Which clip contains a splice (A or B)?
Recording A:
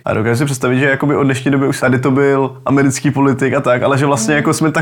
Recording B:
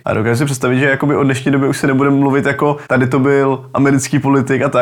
A